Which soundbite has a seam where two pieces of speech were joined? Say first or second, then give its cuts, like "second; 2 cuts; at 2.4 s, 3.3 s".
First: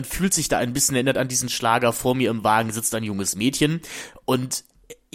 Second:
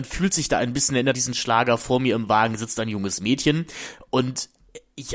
second; 1 cut; at 1.1 s